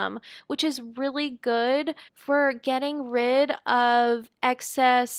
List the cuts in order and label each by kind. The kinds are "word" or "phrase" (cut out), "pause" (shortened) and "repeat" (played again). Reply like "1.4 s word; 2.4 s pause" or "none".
2.1 s pause